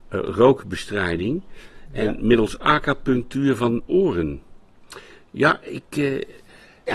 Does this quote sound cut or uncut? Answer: cut